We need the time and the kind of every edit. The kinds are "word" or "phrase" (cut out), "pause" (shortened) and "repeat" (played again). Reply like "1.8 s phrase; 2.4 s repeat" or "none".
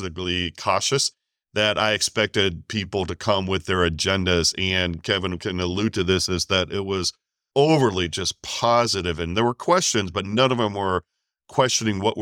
none